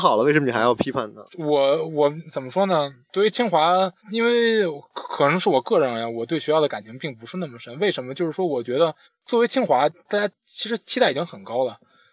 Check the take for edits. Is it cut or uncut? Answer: cut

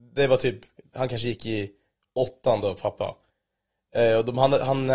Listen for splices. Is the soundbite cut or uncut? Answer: uncut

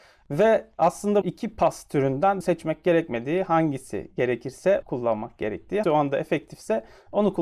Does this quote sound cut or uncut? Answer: cut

